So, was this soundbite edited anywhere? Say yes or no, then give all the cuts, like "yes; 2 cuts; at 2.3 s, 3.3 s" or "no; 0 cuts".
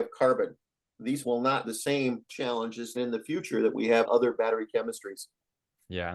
yes; 5 cuts; at 1.2 s, 1.6 s, 2.3 s, 3.0 s, 4.0 s